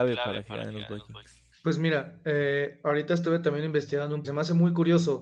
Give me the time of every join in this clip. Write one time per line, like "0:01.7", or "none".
0:04.2